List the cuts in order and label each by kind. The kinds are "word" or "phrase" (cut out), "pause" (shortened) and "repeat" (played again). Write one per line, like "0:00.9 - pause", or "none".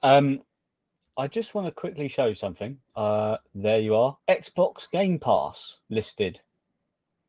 0:02.9 - pause
0:04.2 - pause
0:05.8 - pause